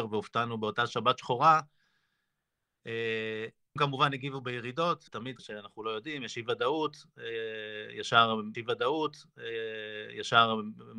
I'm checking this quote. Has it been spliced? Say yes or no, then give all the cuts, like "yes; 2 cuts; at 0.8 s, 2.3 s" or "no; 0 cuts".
yes; 4 cuts; at 3.8 s, 5.1 s, 5.4 s, 8.5 s